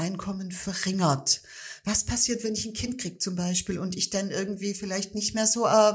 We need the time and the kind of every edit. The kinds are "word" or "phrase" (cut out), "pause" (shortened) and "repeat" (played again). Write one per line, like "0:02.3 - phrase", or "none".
none